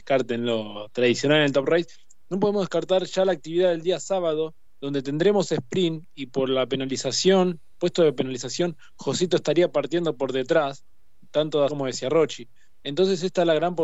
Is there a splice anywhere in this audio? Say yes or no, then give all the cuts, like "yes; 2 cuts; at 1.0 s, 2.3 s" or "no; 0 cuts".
yes; 1 cut; at 11.7 s